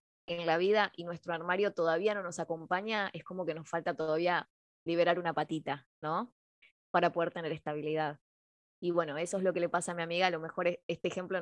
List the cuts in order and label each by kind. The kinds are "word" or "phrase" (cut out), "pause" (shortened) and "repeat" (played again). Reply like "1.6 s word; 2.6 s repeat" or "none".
none